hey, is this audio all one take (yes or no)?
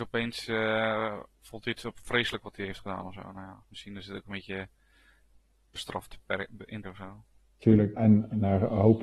no